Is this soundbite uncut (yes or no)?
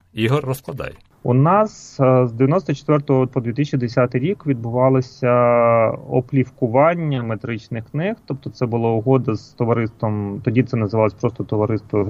yes